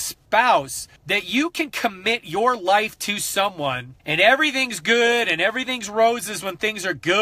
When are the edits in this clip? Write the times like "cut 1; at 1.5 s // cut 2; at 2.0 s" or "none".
cut 1; at 1.0 s // cut 2; at 4.0 s